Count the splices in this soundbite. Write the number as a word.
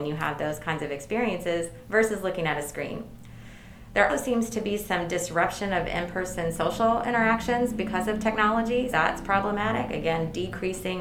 two